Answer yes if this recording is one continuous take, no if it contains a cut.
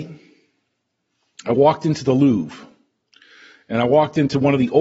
yes